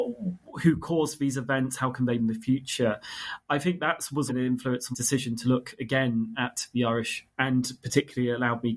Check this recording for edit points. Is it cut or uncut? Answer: cut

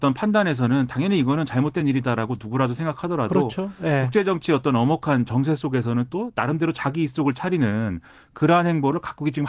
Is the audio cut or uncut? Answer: uncut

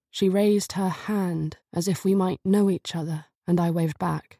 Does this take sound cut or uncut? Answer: cut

